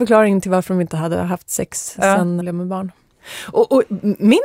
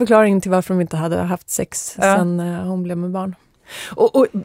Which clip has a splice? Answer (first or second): first